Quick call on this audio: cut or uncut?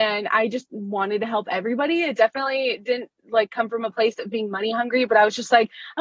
uncut